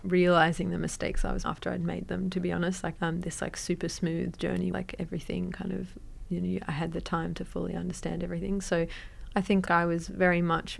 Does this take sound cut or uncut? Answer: cut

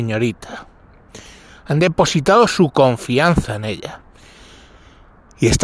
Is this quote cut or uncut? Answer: uncut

